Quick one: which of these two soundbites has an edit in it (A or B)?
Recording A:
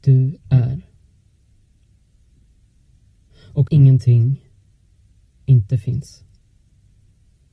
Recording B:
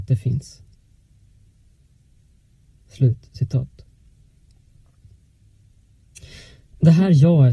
A